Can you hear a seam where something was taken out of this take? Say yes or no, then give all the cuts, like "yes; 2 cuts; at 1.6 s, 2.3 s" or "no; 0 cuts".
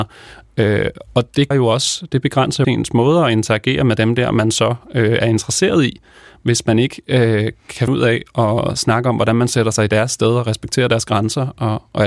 yes; 3 cuts; at 1.5 s, 2.6 s, 7.9 s